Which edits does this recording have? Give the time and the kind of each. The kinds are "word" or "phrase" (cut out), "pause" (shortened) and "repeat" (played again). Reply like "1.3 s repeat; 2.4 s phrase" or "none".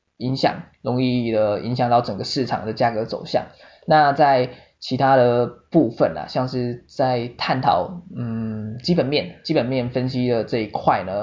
none